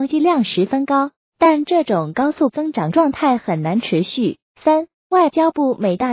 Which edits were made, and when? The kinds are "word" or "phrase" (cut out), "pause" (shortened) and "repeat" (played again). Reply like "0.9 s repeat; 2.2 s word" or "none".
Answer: 4.4 s pause